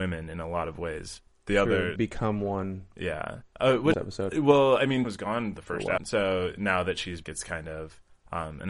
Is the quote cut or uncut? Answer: cut